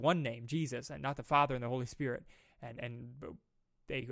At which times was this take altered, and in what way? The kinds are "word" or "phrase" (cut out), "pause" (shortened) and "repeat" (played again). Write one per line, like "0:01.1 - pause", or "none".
none